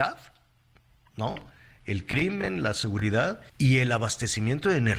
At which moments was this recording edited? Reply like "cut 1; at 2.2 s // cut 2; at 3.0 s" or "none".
cut 1; at 3.5 s